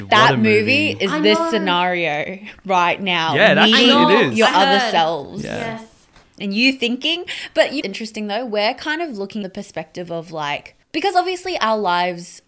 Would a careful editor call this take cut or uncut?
cut